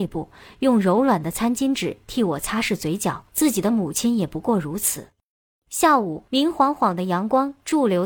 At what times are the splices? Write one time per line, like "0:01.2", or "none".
0:03.3
0:06.3

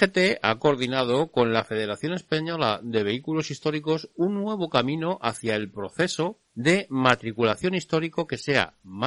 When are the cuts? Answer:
0:06.4

